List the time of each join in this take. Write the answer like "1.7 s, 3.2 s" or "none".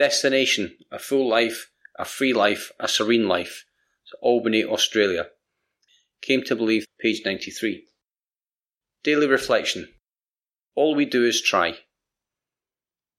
none